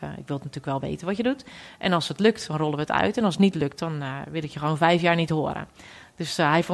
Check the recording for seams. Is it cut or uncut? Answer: uncut